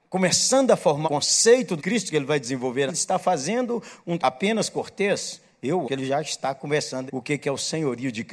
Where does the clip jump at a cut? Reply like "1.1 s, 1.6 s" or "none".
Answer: 1.0 s, 1.8 s, 2.9 s, 4.2 s, 5.8 s, 7.1 s